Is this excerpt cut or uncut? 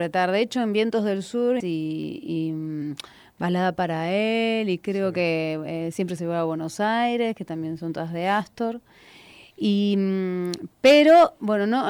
cut